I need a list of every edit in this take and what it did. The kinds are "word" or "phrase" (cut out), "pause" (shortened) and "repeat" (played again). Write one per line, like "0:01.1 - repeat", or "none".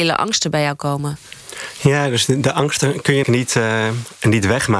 0:03.2 - word